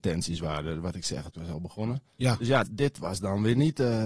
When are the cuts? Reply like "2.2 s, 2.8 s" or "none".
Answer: 1.3 s, 2.6 s